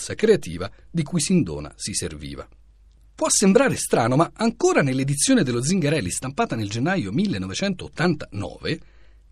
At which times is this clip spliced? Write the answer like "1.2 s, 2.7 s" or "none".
none